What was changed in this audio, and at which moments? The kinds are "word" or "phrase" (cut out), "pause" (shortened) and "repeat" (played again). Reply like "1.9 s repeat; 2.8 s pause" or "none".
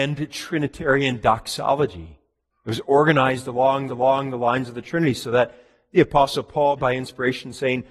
2.5 s pause; 3.9 s repeat; 6.8 s word